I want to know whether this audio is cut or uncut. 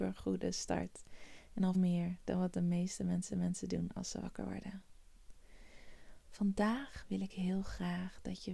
cut